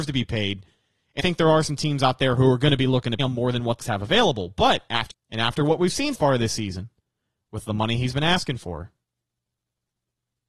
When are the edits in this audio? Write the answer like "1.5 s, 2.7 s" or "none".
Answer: 1.2 s, 3.2 s, 3.8 s, 5.1 s, 6.1 s